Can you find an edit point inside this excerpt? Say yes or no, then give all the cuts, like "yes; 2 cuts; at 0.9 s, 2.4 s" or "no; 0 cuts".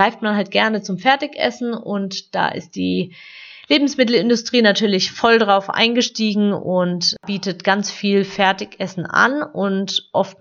no; 0 cuts